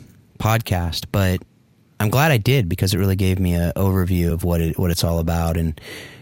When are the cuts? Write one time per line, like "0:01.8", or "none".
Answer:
none

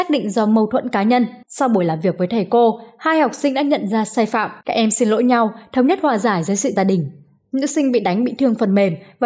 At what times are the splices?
0:01.4
0:04.6
0:06.8

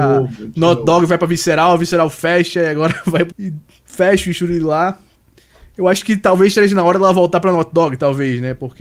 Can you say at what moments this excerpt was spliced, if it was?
0:03.3

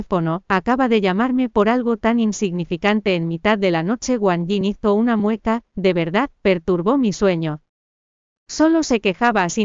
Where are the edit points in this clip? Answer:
none

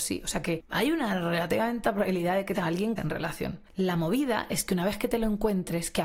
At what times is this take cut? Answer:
0:01.8
0:02.5
0:03.0

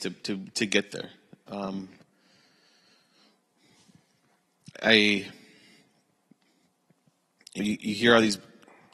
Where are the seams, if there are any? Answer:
0:04.7
0:07.6

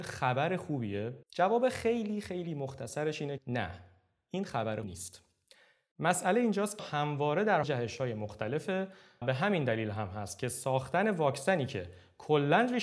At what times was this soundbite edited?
0:01.2
0:03.4
0:04.8
0:06.8
0:07.6
0:09.2

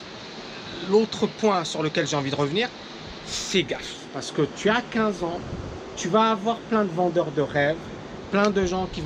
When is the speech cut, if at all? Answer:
none

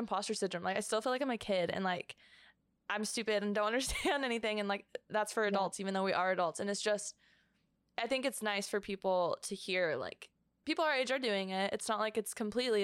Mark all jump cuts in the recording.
none

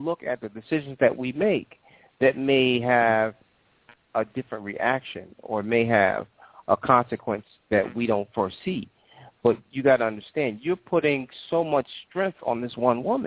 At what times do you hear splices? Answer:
none

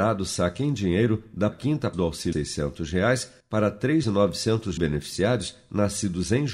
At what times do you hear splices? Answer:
0:01.5
0:01.9
0:02.3
0:03.4
0:04.0
0:04.8

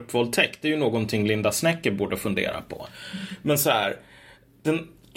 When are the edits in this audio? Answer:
none

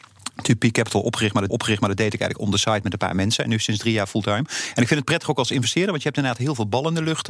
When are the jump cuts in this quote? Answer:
0:01.5

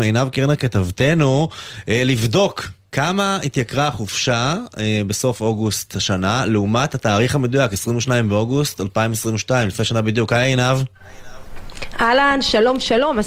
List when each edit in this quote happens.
none

